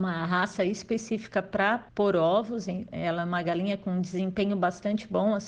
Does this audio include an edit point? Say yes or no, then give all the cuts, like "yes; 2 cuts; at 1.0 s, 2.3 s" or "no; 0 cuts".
yes; 1 cut; at 1.9 s